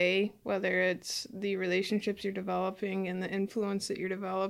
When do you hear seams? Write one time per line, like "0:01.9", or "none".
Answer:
none